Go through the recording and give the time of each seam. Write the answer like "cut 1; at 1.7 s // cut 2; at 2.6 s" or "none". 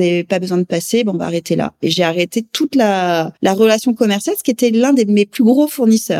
cut 1; at 3.4 s